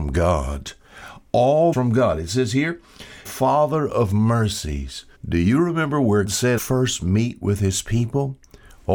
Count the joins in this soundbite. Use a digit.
5